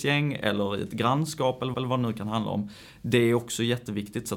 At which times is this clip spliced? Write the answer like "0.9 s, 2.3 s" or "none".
1.7 s

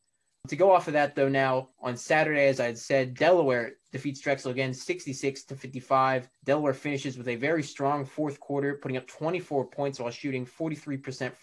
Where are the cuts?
1.7 s, 6.4 s

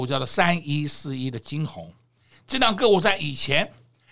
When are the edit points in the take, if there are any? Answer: none

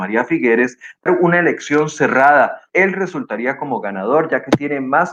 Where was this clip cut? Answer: 1.1 s, 2.7 s

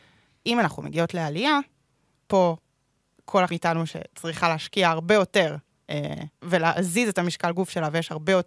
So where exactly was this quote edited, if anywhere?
2.2 s, 3.5 s, 6.3 s

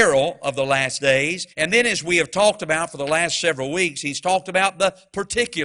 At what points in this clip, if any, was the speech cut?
1.5 s

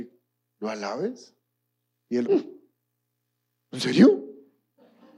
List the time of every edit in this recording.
2.2 s

